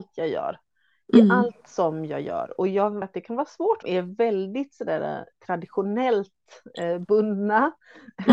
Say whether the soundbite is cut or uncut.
cut